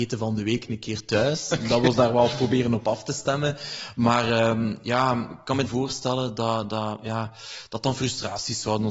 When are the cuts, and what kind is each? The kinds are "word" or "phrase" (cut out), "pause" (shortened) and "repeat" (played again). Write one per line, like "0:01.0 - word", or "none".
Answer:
0:05.7 - phrase